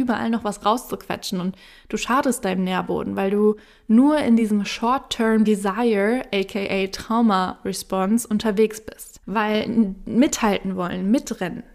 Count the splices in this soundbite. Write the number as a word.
zero